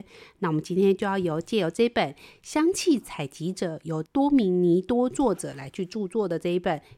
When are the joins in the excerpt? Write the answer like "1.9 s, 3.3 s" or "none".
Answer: none

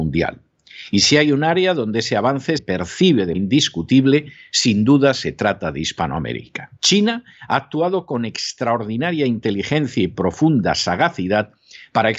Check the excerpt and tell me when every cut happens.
2.6 s, 3.3 s, 6.8 s

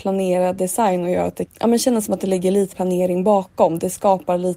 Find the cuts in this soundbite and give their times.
1.5 s, 2.7 s

